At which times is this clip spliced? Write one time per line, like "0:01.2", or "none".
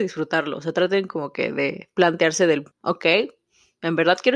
0:02.7